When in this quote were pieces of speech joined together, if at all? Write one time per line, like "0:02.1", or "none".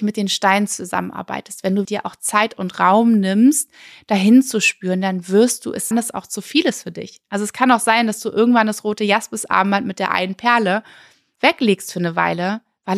0:01.8
0:05.9